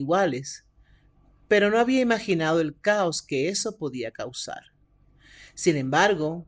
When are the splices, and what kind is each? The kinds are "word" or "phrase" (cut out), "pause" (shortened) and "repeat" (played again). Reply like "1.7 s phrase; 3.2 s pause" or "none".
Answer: none